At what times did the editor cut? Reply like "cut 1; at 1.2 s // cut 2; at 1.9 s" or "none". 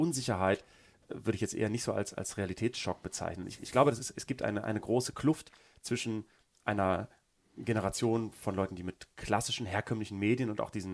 none